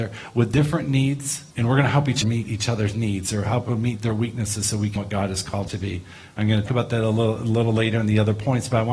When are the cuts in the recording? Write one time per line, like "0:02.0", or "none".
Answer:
0:01.5
0:02.2
0:05.0
0:05.7
0:06.7